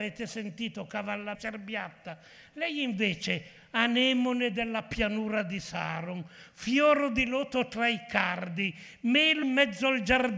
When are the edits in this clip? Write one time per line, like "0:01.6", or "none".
0:01.3
0:09.4